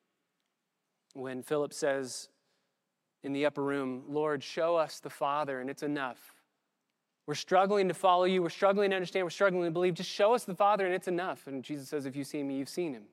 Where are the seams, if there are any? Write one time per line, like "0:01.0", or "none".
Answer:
none